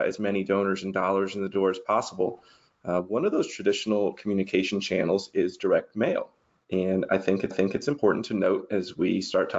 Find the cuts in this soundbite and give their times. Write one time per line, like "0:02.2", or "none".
0:07.5